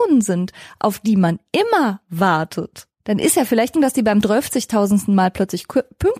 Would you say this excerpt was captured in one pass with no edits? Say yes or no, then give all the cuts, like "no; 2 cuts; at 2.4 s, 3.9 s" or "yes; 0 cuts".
no; 3 cuts; at 2.9 s, 3.7 s, 4.2 s